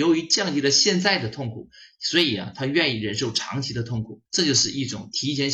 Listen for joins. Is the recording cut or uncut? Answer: cut